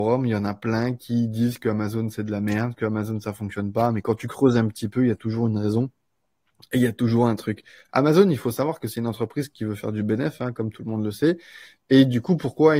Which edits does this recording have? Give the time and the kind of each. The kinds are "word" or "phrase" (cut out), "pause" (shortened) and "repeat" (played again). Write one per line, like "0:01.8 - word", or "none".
none